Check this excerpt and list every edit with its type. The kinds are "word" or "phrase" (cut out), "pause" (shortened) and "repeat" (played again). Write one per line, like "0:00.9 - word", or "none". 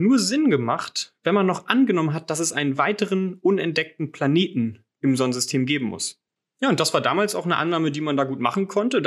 none